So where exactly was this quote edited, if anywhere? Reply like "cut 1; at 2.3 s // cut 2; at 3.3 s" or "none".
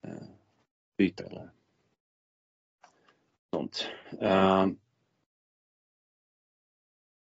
cut 1; at 1.2 s // cut 2; at 3.5 s